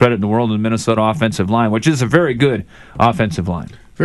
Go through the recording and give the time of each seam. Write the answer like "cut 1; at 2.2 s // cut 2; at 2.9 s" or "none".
none